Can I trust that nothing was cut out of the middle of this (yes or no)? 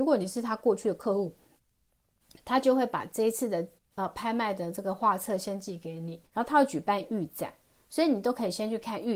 no